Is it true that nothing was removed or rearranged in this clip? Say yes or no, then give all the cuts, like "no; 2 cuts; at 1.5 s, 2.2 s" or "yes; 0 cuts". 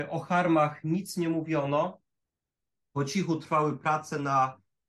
yes; 0 cuts